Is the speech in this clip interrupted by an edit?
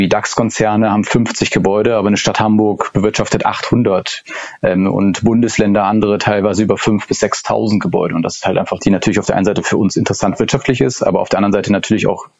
yes; 2 cuts; at 1.0 s, 8.8 s

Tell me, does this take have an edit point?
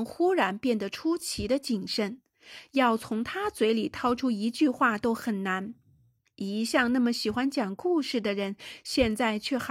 no; 0 cuts

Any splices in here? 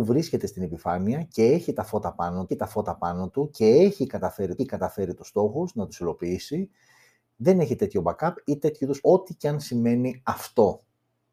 yes; 3 cuts; at 2.5 s, 4.6 s, 9.0 s

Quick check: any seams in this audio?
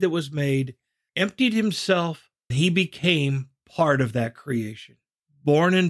yes; 1 cut; at 2.5 s

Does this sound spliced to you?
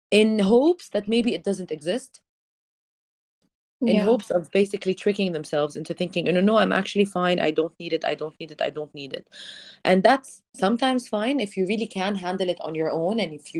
no; 0 cuts

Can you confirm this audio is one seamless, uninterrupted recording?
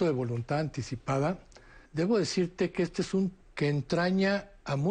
no; 2 cuts; at 1.9 s, 3.4 s

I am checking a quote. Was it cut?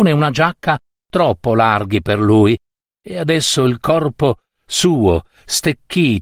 no; 0 cuts

